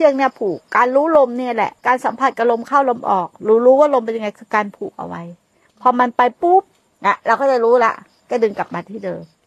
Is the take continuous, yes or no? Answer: no